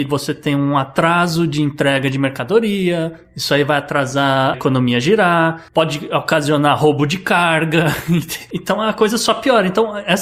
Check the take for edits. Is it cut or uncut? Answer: cut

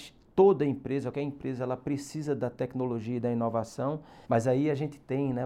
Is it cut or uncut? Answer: cut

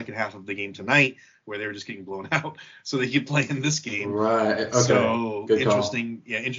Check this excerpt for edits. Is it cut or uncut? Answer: uncut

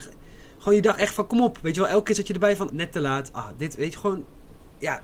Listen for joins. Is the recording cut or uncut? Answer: cut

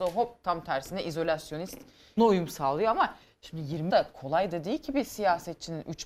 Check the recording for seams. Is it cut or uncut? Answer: cut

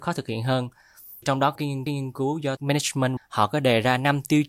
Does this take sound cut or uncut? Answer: cut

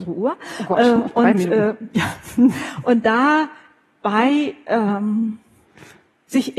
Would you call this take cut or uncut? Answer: uncut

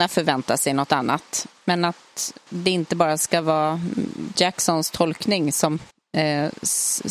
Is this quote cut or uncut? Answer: cut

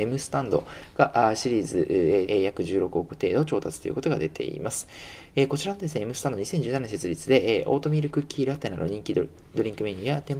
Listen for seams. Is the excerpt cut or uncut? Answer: cut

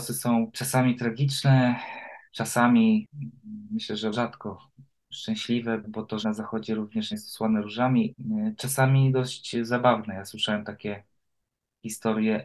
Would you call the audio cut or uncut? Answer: cut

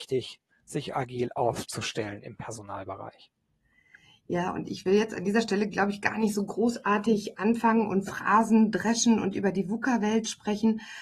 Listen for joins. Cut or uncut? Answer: uncut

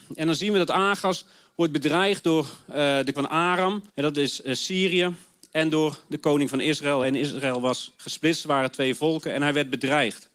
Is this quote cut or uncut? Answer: cut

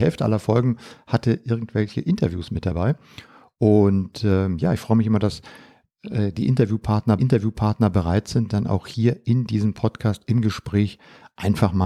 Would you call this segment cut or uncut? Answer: cut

